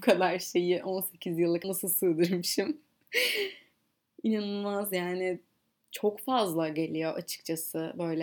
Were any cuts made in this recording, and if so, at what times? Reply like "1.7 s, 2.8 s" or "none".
1.6 s